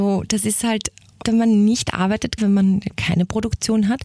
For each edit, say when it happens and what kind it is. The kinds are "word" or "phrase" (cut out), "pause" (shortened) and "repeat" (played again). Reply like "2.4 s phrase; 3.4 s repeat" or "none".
1.2 s word; 2.4 s word; 2.9 s word